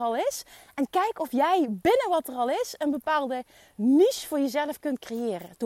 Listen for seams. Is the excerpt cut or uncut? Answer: uncut